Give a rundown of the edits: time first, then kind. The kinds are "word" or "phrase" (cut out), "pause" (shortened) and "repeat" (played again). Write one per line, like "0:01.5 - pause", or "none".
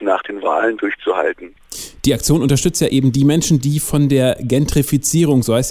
none